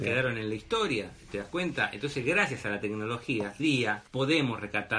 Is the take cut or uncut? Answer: cut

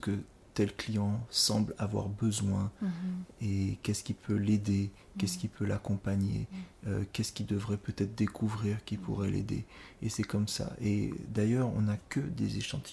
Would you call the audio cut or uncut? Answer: uncut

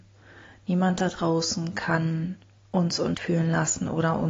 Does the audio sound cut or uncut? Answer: cut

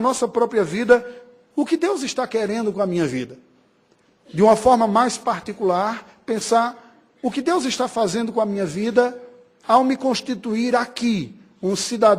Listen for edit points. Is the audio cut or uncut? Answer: uncut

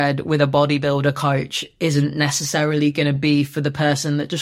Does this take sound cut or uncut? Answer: uncut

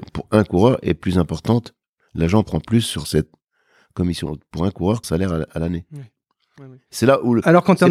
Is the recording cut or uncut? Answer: cut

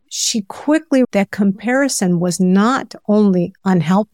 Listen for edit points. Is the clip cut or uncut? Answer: cut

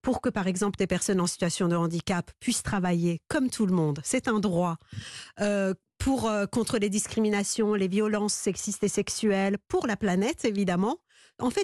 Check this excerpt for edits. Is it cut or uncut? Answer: uncut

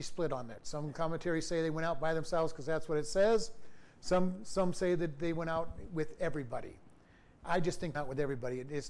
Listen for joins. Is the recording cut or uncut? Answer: cut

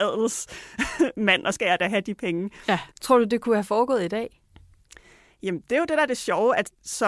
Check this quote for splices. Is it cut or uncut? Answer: cut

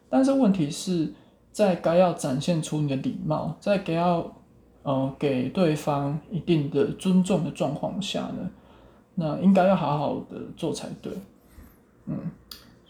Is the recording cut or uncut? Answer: uncut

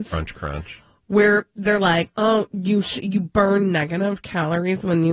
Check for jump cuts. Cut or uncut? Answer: uncut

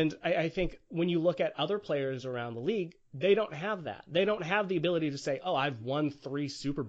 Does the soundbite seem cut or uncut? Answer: uncut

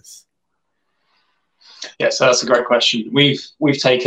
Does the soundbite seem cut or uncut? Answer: cut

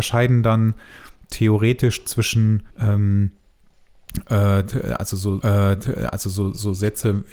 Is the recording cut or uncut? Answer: cut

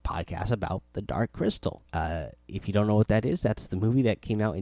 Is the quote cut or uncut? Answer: cut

